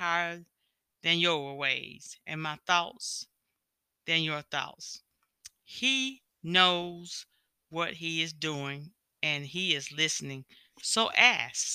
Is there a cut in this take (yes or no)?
no